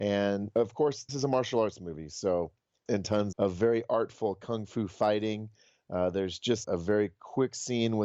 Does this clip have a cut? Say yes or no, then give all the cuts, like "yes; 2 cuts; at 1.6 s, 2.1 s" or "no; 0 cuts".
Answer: yes; 4 cuts; at 1.1 s, 2.9 s, 3.3 s, 6.6 s